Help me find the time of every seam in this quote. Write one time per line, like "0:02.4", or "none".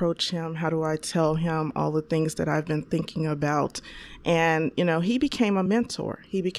none